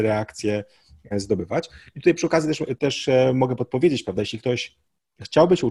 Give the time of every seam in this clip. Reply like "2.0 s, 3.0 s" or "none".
none